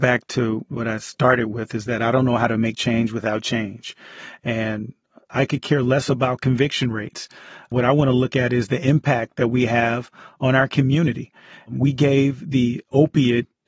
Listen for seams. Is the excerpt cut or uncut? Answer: uncut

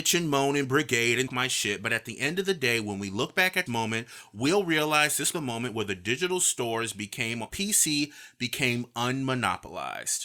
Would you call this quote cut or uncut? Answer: cut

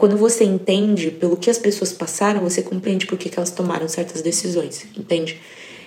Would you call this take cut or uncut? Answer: uncut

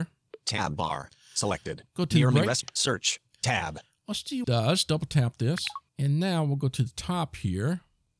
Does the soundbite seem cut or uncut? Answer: cut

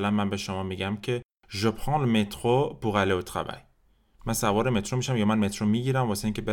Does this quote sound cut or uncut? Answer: uncut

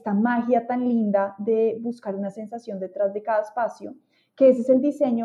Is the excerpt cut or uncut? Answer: uncut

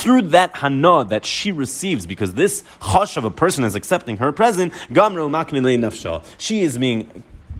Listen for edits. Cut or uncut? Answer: uncut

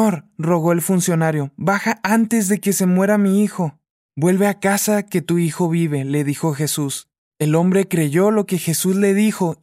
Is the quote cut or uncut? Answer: uncut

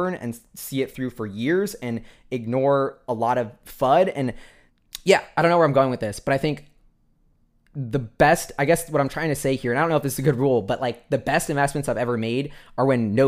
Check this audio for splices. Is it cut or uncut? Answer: uncut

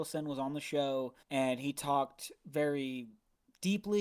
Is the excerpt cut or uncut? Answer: cut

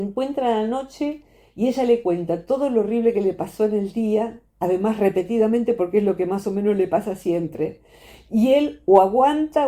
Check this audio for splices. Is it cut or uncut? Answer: uncut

